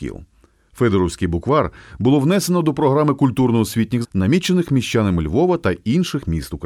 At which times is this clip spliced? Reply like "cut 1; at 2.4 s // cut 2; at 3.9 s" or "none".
cut 1; at 4.0 s